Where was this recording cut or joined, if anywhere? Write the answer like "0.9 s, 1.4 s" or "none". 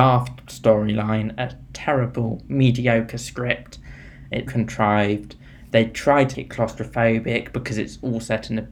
4.5 s, 6.3 s

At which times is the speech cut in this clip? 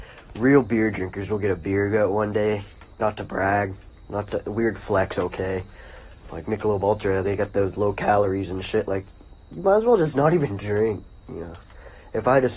2.9 s

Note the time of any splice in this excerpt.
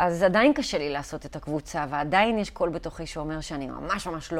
none

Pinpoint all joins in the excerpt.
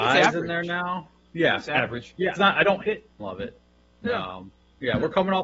2.3 s, 2.9 s, 3.2 s

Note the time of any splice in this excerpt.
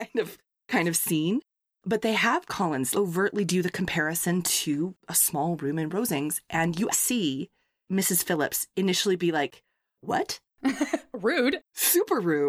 2.9 s, 6.9 s

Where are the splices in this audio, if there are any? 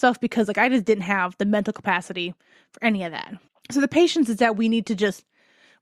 3.5 s

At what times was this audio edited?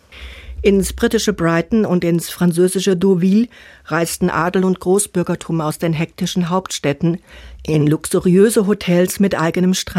none

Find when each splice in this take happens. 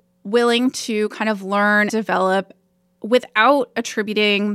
1.9 s

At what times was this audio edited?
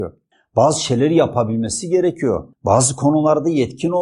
2.5 s

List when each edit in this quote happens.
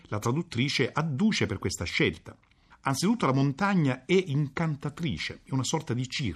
2.7 s

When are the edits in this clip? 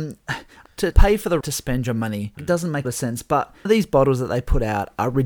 0.9 s, 1.4 s, 2.4 s, 2.8 s, 3.7 s

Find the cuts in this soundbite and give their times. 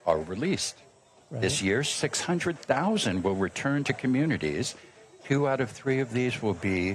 none

